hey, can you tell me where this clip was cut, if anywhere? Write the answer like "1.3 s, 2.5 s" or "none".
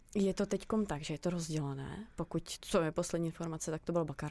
none